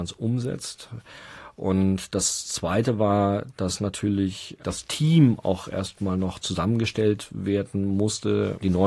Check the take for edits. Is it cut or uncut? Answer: uncut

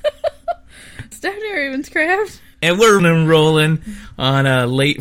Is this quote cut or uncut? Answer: cut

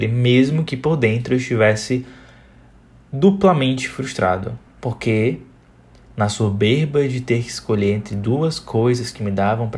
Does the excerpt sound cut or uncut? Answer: cut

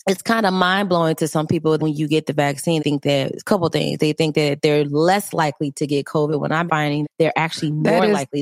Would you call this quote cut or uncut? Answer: cut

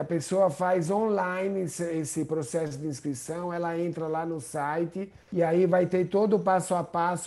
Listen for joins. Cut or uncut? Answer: cut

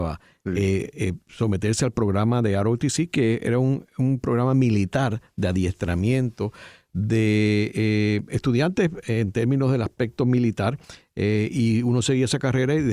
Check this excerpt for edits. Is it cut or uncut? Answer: uncut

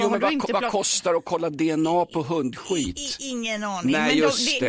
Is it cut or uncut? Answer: uncut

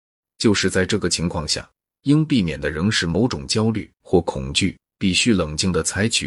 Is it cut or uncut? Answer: uncut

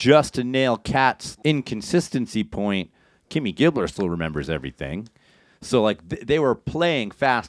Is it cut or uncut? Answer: uncut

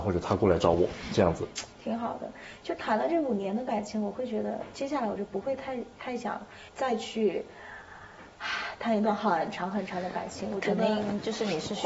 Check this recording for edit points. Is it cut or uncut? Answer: cut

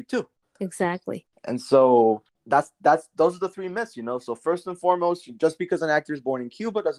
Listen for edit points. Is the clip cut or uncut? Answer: uncut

